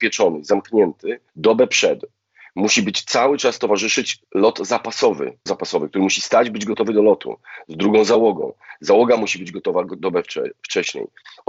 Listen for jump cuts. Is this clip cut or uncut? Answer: cut